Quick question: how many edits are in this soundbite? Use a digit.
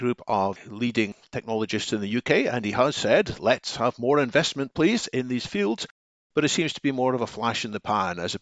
0